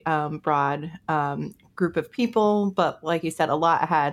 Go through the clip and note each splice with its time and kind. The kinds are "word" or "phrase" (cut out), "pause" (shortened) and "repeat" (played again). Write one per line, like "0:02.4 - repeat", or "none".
none